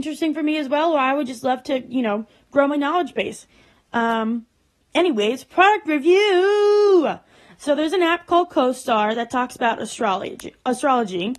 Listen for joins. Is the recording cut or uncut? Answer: uncut